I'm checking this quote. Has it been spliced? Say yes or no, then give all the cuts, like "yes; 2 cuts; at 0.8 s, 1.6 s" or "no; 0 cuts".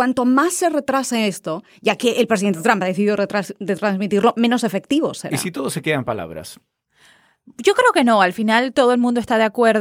no; 0 cuts